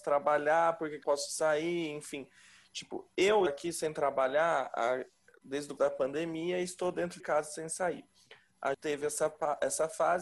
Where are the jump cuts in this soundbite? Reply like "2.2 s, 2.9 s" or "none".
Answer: 1.0 s, 3.5 s, 5.8 s, 7.2 s, 8.7 s

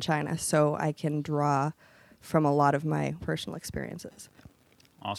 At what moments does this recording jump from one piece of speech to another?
3.2 s

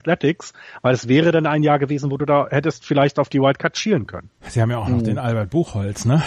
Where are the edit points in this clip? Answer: 4.4 s

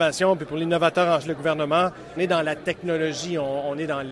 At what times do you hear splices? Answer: 1.2 s, 2.2 s

